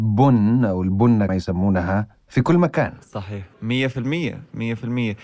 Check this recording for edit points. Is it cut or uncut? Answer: cut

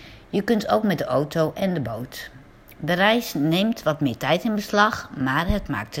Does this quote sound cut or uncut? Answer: uncut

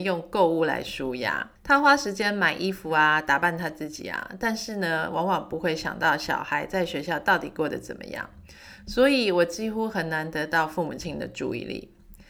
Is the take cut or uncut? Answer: cut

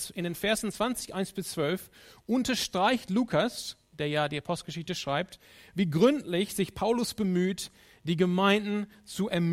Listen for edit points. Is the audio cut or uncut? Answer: uncut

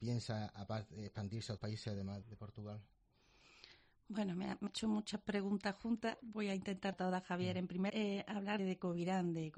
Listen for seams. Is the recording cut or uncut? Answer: cut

